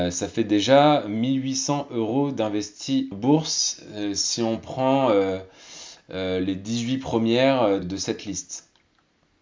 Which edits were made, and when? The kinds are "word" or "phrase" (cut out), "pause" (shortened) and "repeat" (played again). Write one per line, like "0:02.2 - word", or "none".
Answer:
0:03.1 - word
0:07.8 - word